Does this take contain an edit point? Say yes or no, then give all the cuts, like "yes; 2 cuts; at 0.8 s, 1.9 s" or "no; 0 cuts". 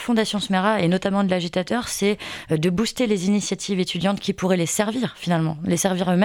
no; 0 cuts